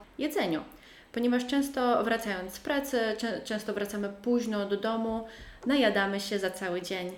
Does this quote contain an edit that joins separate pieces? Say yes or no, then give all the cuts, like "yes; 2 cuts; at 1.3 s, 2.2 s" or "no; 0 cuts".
no; 0 cuts